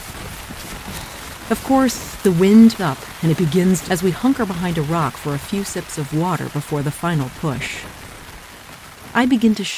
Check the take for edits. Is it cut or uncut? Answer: cut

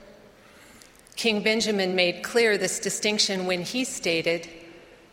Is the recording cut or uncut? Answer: uncut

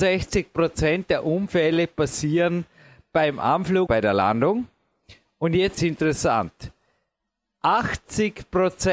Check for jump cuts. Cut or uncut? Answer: cut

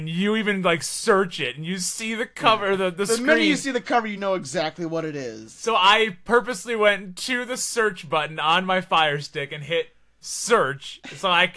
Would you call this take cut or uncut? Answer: uncut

